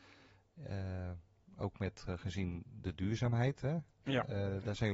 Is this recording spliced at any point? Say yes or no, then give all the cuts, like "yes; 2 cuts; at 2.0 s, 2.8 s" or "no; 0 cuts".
no; 0 cuts